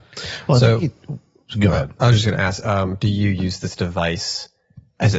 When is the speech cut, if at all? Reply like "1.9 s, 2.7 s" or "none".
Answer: none